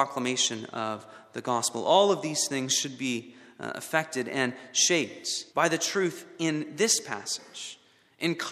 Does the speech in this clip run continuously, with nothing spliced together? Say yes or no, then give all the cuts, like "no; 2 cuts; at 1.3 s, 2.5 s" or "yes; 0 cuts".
no; 1 cut; at 5.5 s